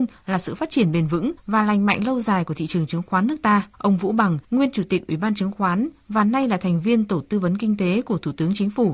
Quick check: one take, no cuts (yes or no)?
no